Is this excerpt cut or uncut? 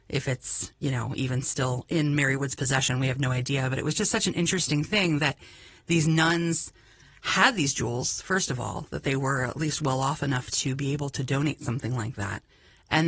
uncut